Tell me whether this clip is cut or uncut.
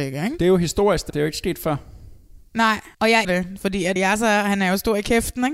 cut